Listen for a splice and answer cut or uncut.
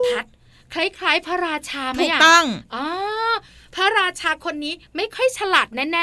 uncut